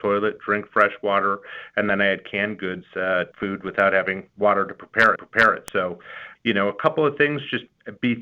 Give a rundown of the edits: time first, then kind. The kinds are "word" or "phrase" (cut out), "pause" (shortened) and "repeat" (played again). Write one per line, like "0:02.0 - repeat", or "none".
0:03.3 - phrase
0:05.2 - repeat
0:06.4 - word